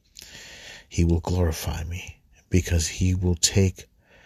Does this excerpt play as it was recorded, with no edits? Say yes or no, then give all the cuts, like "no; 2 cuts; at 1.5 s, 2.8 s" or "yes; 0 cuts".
yes; 0 cuts